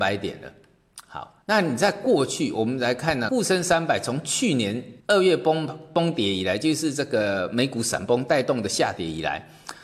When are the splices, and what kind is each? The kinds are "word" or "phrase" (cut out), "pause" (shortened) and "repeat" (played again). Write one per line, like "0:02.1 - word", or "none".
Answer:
0:01.4 - pause
0:03.3 - word
0:05.0 - pause

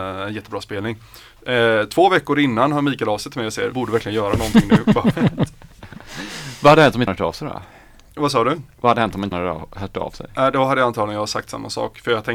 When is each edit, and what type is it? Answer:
0:03.7 - word
0:07.1 - word
0:09.3 - word

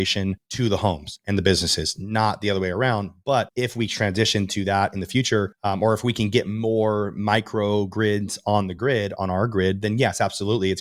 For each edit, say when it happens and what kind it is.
none

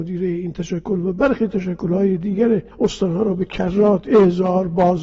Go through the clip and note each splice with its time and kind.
0:02.7 - pause

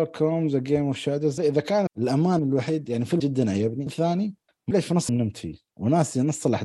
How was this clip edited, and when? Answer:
0:01.4 - word
0:01.9 - word
0:02.4 - word
0:03.2 - word
0:03.9 - word
0:04.7 - word
0:05.1 - word

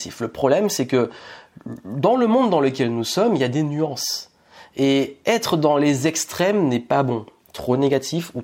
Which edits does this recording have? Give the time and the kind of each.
none

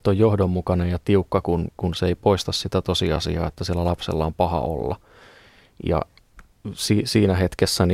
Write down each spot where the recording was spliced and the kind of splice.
none

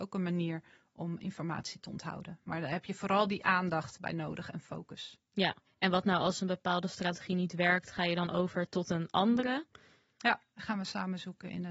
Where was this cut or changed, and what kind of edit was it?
0:05.7 - pause

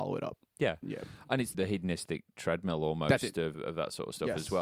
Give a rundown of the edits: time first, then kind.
0:01.5 - word
0:03.5 - word

